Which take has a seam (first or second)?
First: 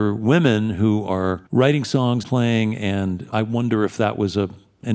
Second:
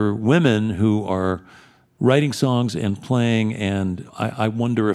first